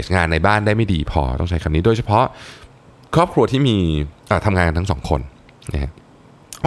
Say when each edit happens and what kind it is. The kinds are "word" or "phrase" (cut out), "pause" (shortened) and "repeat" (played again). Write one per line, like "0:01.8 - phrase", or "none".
none